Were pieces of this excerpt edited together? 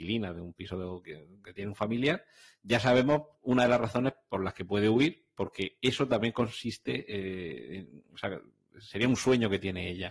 no; 0 cuts

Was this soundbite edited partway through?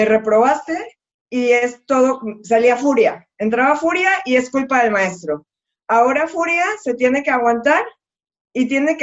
no; 0 cuts

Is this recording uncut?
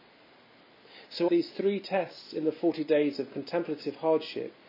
no; 1 cut; at 1.3 s

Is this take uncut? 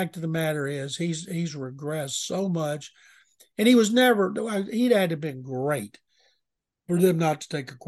yes; 0 cuts

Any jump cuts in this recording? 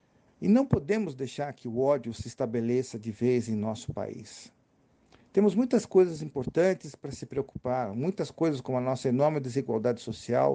no; 0 cuts

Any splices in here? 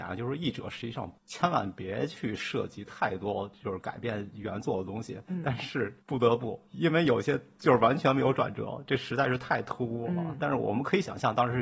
yes; 3 cuts; at 1.2 s, 6.0 s, 6.7 s

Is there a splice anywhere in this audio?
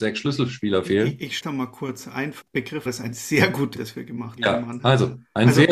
yes; 5 cuts; at 1.4 s, 2.4 s, 2.9 s, 3.8 s, 4.4 s

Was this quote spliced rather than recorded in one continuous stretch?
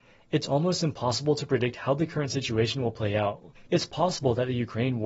yes; 1 cut; at 3.5 s

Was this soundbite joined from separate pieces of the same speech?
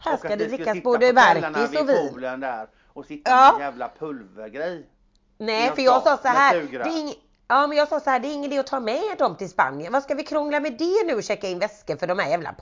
no; 0 cuts

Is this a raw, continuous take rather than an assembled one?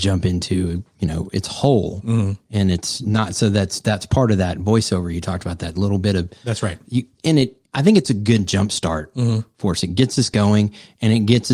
no; 1 cut; at 7.7 s

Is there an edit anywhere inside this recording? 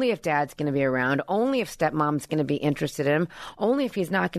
no; 0 cuts

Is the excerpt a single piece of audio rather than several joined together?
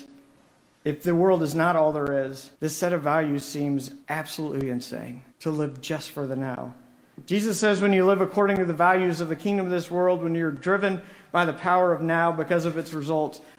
no; 3 cuts; at 2.5 s, 4.0 s, 5.3 s

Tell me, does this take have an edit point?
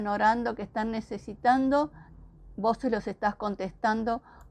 no; 0 cuts

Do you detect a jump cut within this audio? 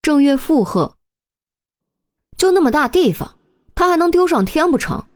no; 0 cuts

